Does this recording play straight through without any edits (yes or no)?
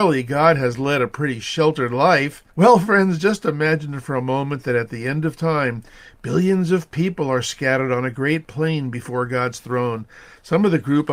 no